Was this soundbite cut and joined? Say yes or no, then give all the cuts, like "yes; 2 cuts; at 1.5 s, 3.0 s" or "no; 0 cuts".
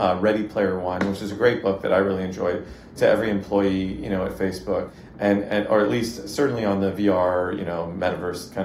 no; 0 cuts